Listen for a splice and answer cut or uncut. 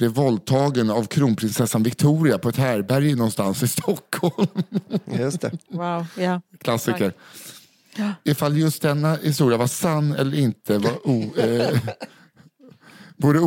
uncut